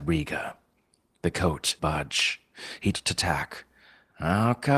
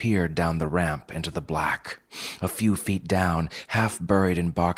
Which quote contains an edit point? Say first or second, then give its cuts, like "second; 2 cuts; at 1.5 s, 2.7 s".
first; 2 cuts; at 1.8 s, 2.9 s